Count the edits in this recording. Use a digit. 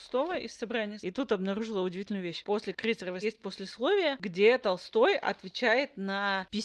2